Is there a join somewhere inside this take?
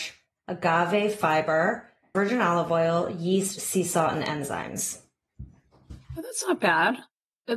yes; 2 cuts; at 2.1 s, 6.0 s

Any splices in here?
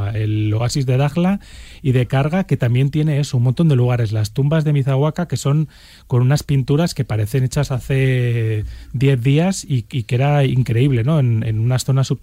no; 0 cuts

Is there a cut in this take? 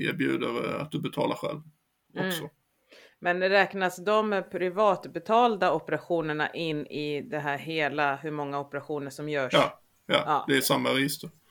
no; 0 cuts

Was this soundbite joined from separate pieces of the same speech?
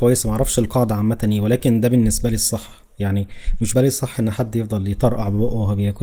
yes; 1 cut; at 3.7 s

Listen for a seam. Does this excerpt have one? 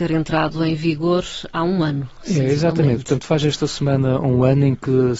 no; 0 cuts

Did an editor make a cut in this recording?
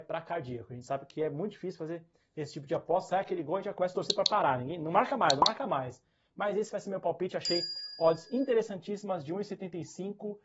no; 0 cuts

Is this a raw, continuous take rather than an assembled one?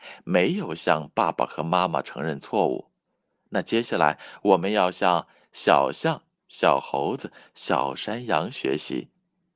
yes; 0 cuts

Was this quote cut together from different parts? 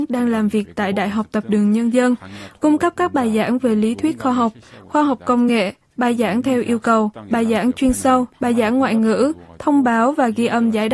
no; 0 cuts

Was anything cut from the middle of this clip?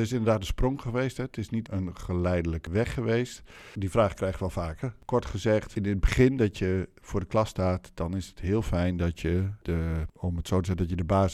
no; 0 cuts

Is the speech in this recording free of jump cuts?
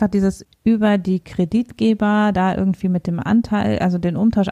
yes; 0 cuts

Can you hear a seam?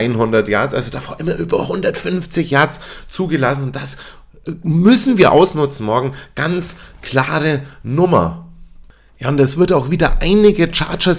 no; 0 cuts

